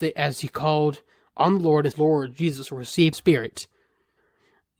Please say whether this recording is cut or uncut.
cut